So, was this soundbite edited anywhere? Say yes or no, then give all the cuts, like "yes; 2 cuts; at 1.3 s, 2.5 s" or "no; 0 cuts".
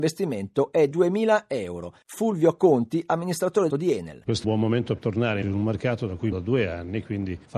yes; 5 cuts; at 0.9 s, 3.7 s, 4.4 s, 5.0 s, 6.3 s